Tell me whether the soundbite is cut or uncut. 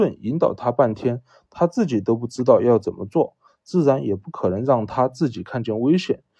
uncut